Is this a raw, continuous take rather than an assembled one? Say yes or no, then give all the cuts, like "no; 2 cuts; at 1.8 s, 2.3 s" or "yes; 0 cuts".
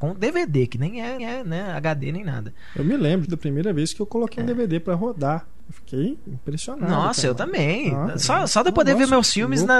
no; 2 cuts; at 1.2 s, 3.3 s